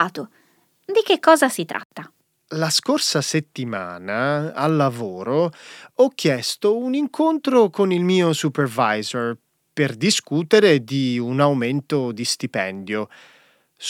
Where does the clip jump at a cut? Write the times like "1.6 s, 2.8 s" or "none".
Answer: none